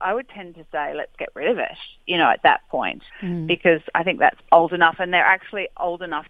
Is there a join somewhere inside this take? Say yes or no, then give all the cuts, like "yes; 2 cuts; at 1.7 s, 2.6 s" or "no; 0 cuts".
yes; 2 cuts; at 3.1 s, 4.4 s